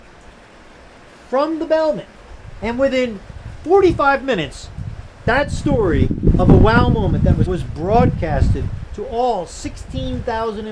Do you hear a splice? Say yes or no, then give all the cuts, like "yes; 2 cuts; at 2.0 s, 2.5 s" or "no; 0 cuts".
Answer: yes; 1 cut; at 7.5 s